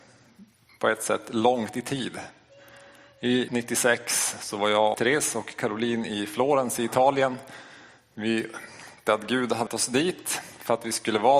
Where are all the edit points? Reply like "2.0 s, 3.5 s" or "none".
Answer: 3.5 s, 4.9 s, 9.1 s, 9.7 s

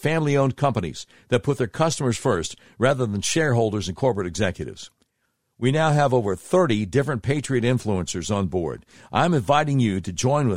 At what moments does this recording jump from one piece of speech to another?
none

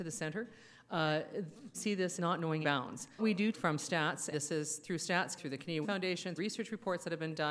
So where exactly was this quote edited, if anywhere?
1.7 s, 2.2 s, 2.6 s, 3.2 s, 3.5 s, 4.3 s, 5.4 s, 5.8 s, 6.4 s

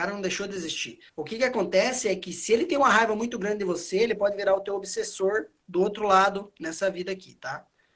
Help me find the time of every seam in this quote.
1.1 s

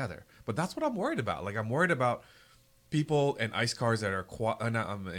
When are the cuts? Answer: none

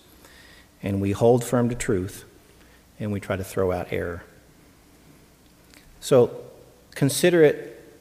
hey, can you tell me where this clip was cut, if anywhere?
none

